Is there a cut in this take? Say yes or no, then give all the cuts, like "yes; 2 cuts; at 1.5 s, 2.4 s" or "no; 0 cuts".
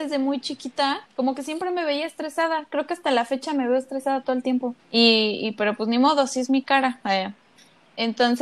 yes; 2 cuts; at 1.1 s, 4.8 s